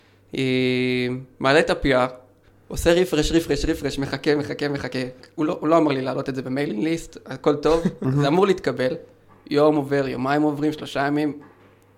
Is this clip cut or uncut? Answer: uncut